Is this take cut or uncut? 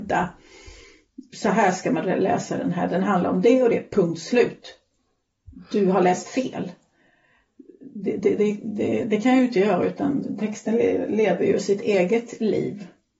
uncut